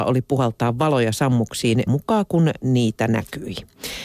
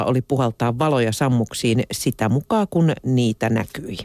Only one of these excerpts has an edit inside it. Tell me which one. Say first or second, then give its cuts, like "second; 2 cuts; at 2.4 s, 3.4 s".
first; 1 cut; at 1.9 s